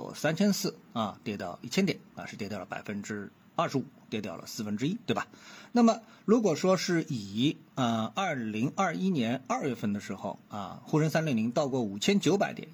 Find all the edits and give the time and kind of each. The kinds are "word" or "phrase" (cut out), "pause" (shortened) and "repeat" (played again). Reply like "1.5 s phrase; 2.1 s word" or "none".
none